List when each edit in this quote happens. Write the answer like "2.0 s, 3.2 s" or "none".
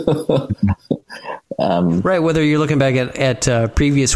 none